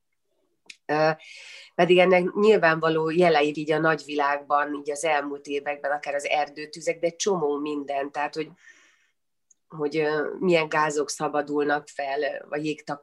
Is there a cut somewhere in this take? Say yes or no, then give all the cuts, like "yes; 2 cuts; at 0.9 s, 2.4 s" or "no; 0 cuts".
yes; 1 cut; at 3.5 s